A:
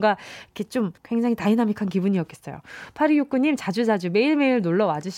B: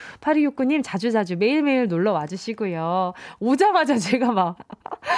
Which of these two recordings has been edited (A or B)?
A